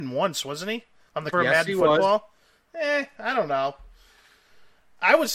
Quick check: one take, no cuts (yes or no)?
no